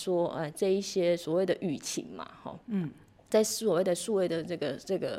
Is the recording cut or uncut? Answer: uncut